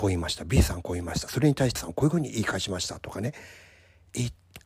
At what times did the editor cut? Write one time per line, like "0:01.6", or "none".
0:01.8